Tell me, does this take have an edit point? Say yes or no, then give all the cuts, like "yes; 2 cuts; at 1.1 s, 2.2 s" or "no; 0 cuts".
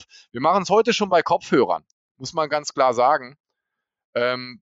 no; 0 cuts